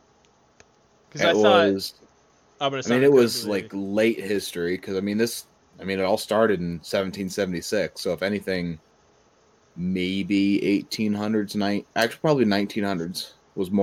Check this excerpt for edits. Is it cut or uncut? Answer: uncut